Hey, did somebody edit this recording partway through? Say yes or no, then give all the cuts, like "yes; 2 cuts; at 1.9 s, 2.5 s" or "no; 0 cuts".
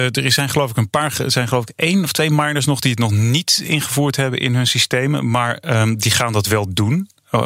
no; 0 cuts